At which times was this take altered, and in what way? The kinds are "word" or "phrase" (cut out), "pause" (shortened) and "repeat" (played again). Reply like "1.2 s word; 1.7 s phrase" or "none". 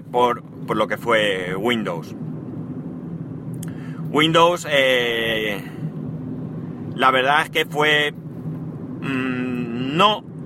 none